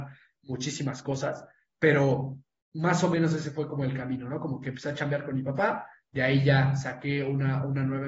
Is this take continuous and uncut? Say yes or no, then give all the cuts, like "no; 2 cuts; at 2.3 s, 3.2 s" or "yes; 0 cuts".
yes; 0 cuts